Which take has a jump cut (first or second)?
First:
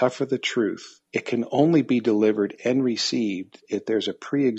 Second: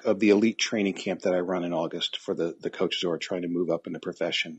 first